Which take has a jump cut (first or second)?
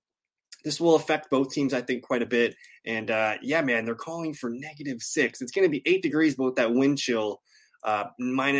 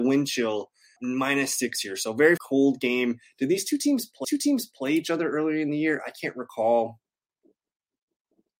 second